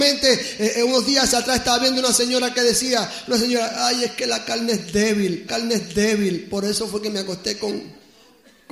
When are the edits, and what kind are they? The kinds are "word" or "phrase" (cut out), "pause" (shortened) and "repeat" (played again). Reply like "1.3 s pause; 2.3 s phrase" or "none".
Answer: 5.5 s repeat